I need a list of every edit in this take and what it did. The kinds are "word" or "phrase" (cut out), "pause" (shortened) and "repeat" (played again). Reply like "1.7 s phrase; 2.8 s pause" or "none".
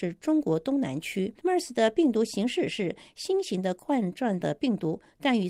1.4 s pause